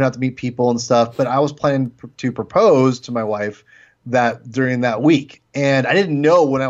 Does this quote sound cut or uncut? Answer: uncut